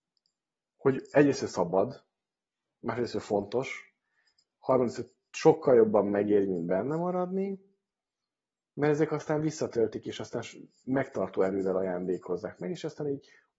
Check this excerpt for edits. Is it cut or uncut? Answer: uncut